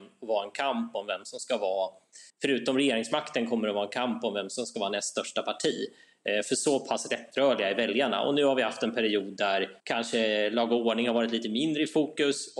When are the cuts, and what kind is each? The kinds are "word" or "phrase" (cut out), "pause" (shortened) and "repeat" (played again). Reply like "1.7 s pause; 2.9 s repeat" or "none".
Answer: 2.3 s pause; 9.8 s pause